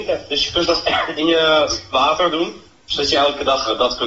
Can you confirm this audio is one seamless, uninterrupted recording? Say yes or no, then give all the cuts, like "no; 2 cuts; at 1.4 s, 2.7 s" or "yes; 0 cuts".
yes; 0 cuts